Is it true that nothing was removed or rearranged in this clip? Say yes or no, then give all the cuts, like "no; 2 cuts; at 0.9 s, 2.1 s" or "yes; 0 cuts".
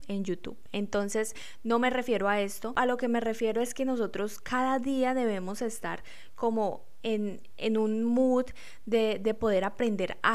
yes; 0 cuts